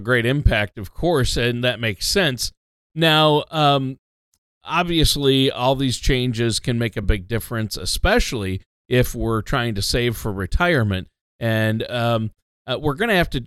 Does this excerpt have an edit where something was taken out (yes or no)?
no